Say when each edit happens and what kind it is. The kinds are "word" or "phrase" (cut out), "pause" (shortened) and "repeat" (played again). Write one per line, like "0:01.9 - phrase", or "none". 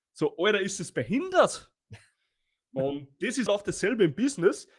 0:03.5 - word

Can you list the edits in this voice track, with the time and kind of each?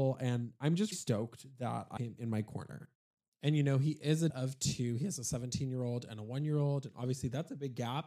0:00.9 - word
0:02.0 - word
0:04.3 - word

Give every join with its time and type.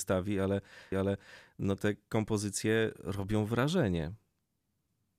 0:00.9 - repeat

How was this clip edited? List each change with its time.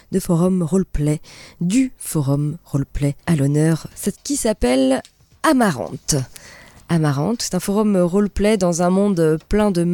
0:03.2 - pause
0:04.1 - word
0:07.4 - word

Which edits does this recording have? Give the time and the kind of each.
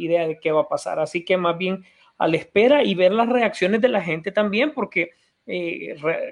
none

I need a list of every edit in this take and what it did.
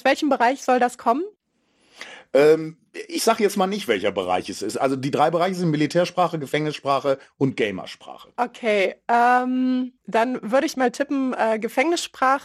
0:10.0 - pause

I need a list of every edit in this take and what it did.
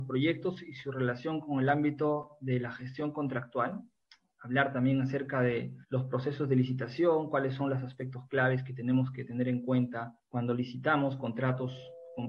0:04.0 - pause
0:05.8 - pause
0:10.2 - pause

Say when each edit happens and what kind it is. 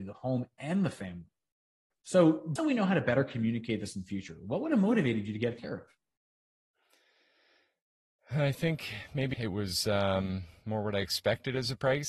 0:02.6 - word
0:05.6 - word
0:09.3 - word

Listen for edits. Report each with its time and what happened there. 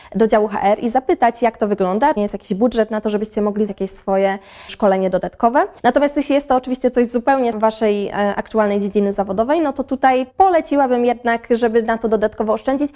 0:02.2 - phrase
0:03.7 - word
0:04.7 - word
0:05.8 - pause
0:07.5 - word
0:10.3 - pause

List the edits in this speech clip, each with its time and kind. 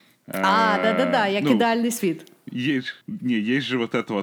0:03.0 - pause

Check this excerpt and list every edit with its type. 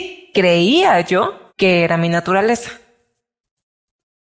0:01.5 - pause

